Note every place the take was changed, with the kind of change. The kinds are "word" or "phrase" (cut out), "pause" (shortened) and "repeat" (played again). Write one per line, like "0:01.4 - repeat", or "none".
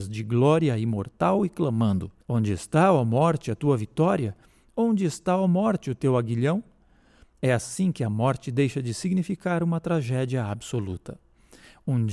0:02.2 - pause

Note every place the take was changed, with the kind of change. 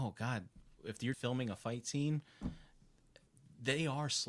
0:01.1 - word

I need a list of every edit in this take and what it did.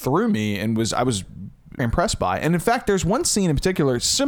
0:01.8 - word

